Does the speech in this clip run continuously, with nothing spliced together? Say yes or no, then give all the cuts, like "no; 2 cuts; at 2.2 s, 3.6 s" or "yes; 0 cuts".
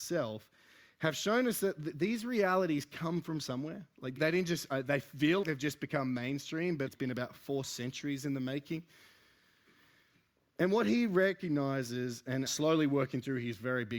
no; 4 cuts; at 4.2 s, 5.4 s, 6.9 s, 12.5 s